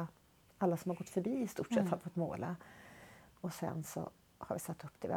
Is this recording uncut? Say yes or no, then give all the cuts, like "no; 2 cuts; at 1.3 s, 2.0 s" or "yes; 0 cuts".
yes; 0 cuts